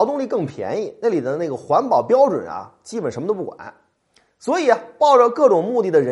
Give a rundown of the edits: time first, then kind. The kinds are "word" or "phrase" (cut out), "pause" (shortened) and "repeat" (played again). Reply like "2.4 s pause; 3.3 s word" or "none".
none